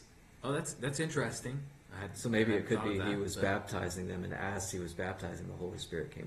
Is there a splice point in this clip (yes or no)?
no